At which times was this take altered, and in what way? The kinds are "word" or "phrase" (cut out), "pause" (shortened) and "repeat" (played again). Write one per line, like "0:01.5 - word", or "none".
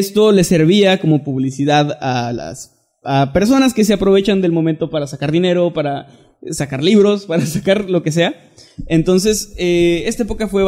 none